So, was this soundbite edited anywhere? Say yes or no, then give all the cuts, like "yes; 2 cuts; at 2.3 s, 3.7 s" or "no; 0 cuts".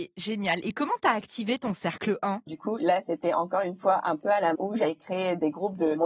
yes; 2 cuts; at 2.5 s, 4.5 s